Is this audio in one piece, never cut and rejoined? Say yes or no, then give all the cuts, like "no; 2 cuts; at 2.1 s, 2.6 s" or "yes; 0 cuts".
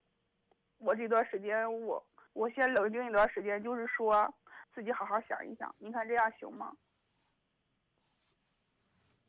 no; 2 cuts; at 2.3 s, 4.6 s